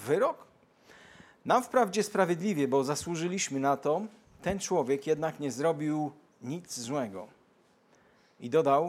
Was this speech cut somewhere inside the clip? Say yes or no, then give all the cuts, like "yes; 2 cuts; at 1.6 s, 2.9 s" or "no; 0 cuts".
no; 0 cuts